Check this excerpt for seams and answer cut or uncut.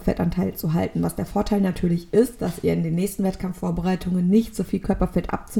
uncut